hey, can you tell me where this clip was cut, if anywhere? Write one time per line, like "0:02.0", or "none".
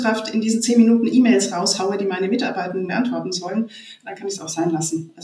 0:02.9

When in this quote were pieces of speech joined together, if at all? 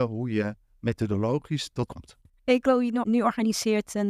0:01.9
0:03.0

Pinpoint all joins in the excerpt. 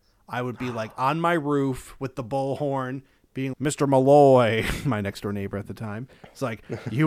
0:03.5

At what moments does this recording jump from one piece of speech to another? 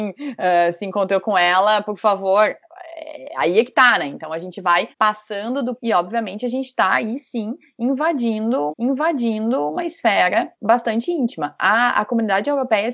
0:04.9
0:05.8
0:08.7
0:10.5

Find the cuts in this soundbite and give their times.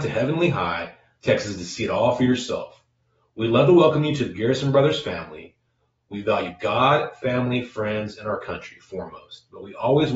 none

